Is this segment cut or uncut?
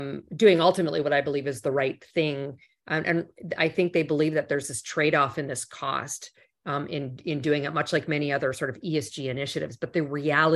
uncut